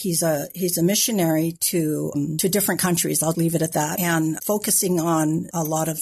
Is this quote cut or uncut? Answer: cut